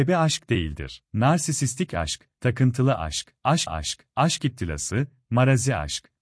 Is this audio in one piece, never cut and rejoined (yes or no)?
no